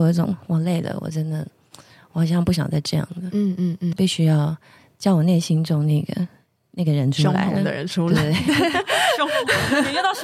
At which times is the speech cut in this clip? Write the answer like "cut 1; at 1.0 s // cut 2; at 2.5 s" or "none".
cut 1; at 3.9 s

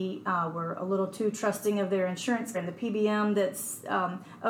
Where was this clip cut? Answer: cut 1; at 2.5 s

